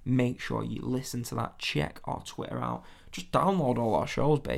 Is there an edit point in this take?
no; 0 cuts

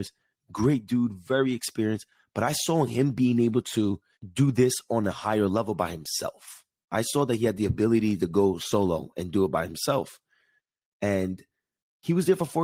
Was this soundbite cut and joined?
yes; 1 cut; at 4.1 s

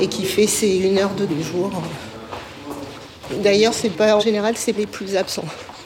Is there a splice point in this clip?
yes; 3 cuts; at 1.3 s, 4.2 s, 4.8 s

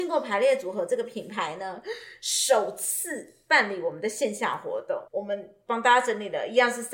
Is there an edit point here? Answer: yes; 1 cut; at 5.1 s

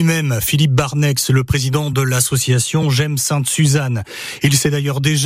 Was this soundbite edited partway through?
no; 0 cuts

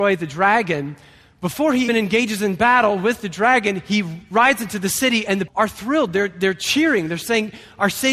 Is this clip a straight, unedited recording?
no; 2 cuts; at 1.9 s, 5.5 s

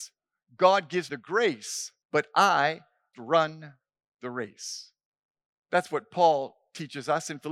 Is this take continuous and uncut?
no; 3 cuts; at 1.1 s, 2.0 s, 3.1 s

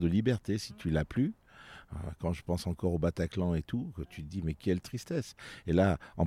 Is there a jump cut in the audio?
no; 0 cuts

